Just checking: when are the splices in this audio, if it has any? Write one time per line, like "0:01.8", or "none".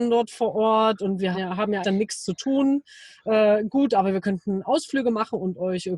0:01.3
0:01.8

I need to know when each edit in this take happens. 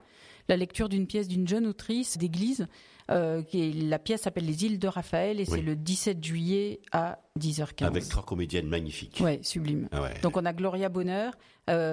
0:02.2

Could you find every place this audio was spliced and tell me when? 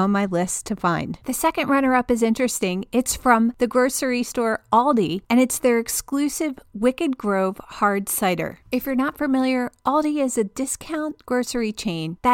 0:08.6

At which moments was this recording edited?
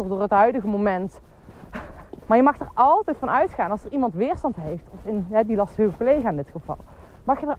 0:02.2

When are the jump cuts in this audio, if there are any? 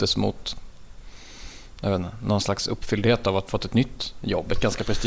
0:03.5

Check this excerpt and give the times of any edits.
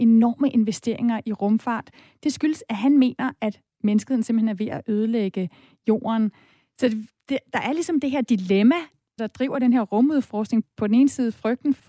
none

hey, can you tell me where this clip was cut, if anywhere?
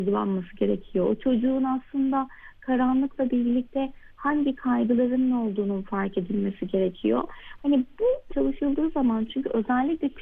0:08.3

